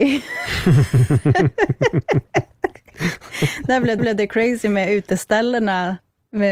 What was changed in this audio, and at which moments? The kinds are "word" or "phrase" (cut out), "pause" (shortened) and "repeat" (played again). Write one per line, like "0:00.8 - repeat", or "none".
0:04.0 - repeat